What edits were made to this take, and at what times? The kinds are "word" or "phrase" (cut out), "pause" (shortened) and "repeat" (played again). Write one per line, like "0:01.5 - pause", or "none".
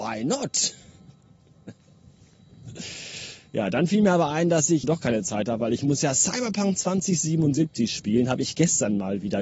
0:04.8 - word

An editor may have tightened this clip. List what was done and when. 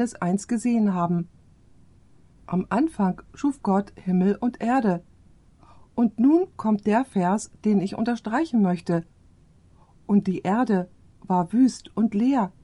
none

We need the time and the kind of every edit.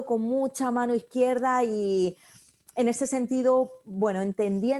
none

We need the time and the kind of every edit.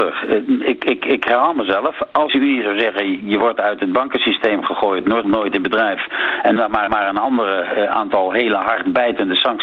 0:02.3 - phrase
0:05.2 - phrase
0:06.6 - word
0:06.9 - repeat

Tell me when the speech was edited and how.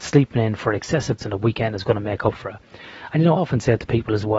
0:01.2 - word
0:03.3 - word

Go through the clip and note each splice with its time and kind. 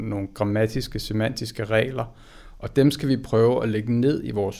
none

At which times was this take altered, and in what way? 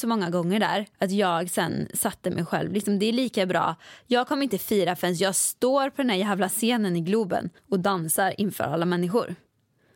0:00.9 - pause
0:07.6 - pause

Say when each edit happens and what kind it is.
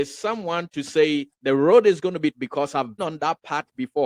0:01.3 - pause
0:02.3 - word
0:03.0 - word

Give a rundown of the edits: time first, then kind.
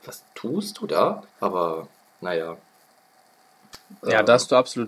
0:01.3 - pause

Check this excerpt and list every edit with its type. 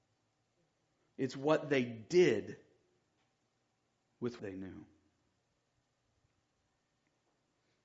0:04.4 - word

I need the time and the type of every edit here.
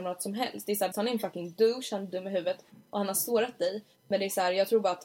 0:00.9 - word

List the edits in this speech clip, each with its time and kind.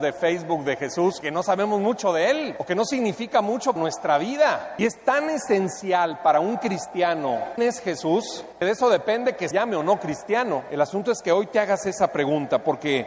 0:01.2 - word
0:03.8 - word
0:07.6 - word
0:09.5 - word

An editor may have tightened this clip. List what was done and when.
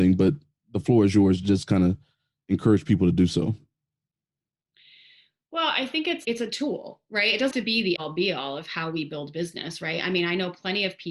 0:06.2 - word
0:07.5 - word
0:08.0 - word

